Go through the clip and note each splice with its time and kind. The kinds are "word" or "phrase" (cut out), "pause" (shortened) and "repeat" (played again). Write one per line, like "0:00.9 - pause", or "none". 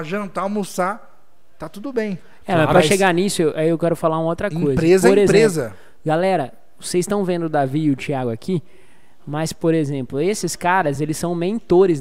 none